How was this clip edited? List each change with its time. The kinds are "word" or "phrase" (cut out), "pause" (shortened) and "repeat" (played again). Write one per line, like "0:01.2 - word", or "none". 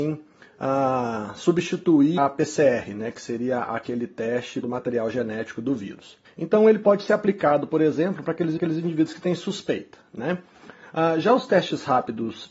0:02.2 - word
0:04.6 - phrase
0:06.2 - pause
0:08.6 - repeat